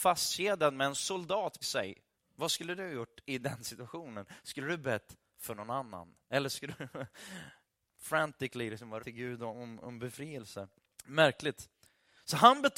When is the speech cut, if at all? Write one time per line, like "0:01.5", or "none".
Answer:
0:01.6
0:02.2
0:06.2
0:09.0
0:09.8
0:10.8